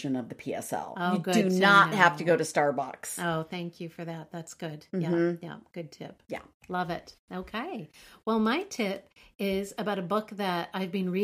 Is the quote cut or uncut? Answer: uncut